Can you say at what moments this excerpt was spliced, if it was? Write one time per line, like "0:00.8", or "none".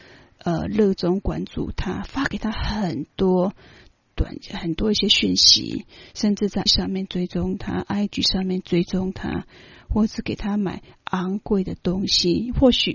0:06.7